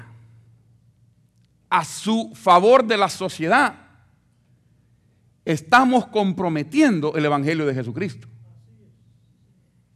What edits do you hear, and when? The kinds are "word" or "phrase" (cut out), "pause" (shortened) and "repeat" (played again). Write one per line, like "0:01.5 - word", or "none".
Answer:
none

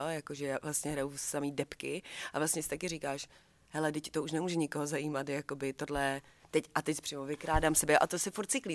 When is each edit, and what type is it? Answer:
none

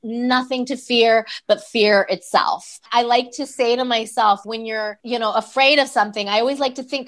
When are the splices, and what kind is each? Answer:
0:04.4 - word

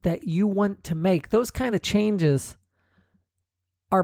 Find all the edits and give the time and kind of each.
none

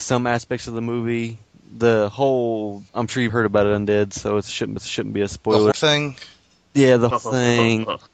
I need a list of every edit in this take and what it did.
0:02.9 - pause
0:03.3 - word
0:04.8 - repeat
0:05.7 - word
0:07.1 - word

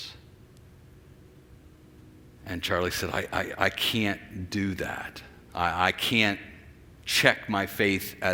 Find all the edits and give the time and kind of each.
none

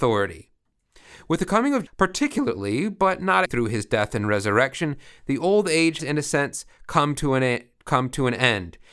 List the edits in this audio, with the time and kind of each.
0:01.9 - word
0:03.4 - word
0:06.0 - word

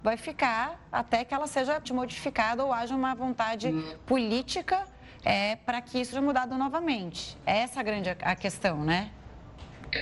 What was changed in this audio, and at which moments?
0:01.8 - word
0:05.2 - word
0:06.1 - word

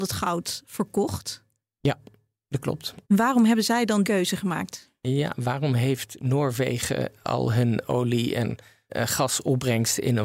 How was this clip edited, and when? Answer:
0:03.0 - pause
0:04.0 - word
0:08.9 - word

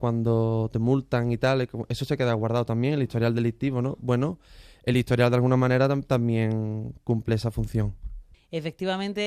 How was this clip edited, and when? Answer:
none

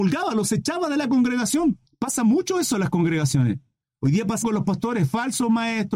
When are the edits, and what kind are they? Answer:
0:01.9 - pause
0:04.4 - word

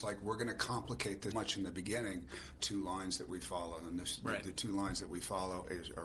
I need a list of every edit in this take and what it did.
0:01.3 - word
0:02.6 - phrase

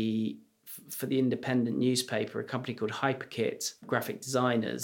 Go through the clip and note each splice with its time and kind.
0:03.8 - pause

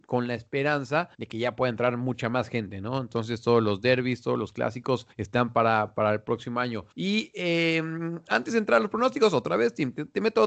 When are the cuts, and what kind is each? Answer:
0:01.1 - pause
0:05.1 - pause
0:06.9 - pause

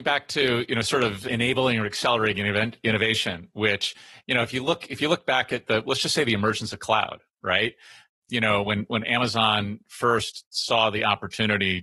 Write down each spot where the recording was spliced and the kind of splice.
none

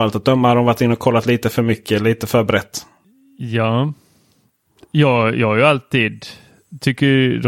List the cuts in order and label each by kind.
none

